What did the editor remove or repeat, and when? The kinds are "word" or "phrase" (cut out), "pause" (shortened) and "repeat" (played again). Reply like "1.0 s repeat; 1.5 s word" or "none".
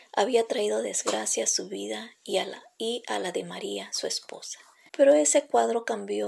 none